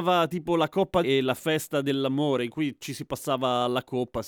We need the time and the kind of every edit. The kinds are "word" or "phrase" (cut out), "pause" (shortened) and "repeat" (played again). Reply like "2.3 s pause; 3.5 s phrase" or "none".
1.0 s word